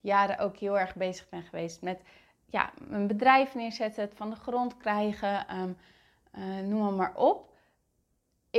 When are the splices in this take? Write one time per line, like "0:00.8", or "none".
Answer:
none